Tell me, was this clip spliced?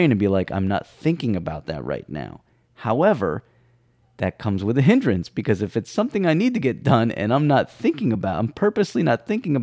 no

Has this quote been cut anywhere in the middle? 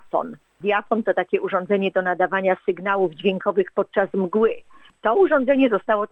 no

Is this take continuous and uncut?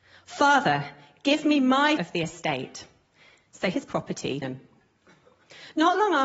no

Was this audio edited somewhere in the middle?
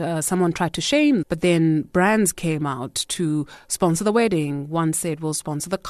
yes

